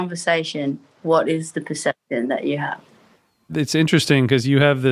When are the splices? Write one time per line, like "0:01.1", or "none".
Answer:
none

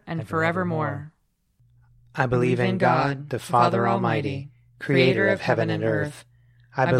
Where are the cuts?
none

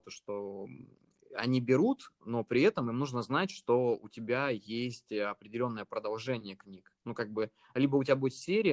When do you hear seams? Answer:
none

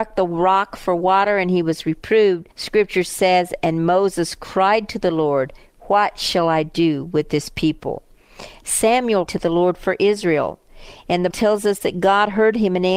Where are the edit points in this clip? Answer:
0:02.5
0:09.3
0:11.3

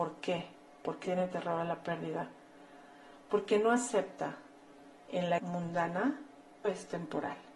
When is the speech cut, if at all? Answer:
0:01.0
0:05.1
0:05.4
0:06.6

